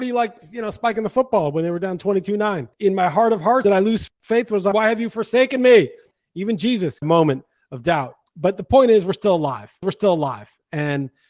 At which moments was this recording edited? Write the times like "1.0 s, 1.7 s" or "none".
2.7 s, 3.6 s, 4.7 s, 7.0 s, 8.3 s, 9.8 s